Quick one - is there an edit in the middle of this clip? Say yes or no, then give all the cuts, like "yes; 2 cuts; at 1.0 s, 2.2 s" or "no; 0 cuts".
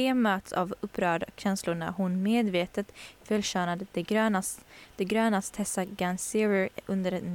no; 0 cuts